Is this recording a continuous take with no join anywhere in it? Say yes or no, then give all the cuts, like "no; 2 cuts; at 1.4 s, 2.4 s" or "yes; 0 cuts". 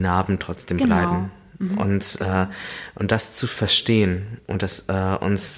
yes; 0 cuts